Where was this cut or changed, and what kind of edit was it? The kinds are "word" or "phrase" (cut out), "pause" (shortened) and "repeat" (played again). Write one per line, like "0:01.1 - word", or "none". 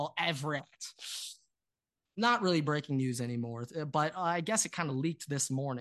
none